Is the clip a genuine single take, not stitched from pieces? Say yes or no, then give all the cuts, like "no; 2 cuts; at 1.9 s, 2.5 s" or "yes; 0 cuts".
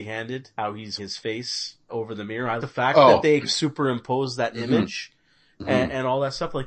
no; 4 cuts; at 1.0 s, 1.9 s, 2.6 s, 3.4 s